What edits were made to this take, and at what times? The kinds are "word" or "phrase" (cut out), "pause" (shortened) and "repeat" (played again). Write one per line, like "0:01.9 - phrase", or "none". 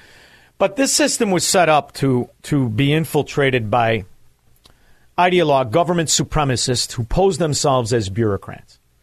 none